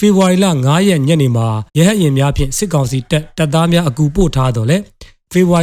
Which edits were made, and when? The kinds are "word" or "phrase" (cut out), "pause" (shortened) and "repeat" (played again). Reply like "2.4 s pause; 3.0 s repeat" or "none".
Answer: 1.7 s pause